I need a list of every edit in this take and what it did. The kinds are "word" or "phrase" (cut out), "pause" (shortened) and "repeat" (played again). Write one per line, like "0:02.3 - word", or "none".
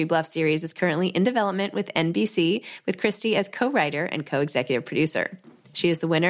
none